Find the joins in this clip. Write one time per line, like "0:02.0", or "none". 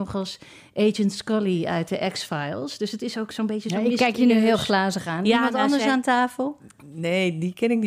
none